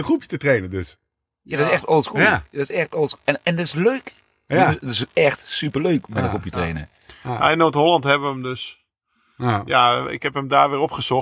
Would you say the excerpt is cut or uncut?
uncut